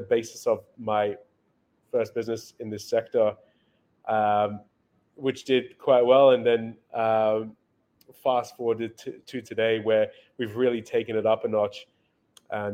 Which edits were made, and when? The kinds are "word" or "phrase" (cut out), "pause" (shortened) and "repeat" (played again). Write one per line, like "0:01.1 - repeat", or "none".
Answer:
none